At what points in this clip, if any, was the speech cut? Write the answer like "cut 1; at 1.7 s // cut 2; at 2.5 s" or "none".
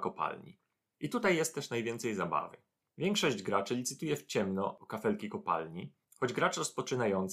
cut 1; at 6.0 s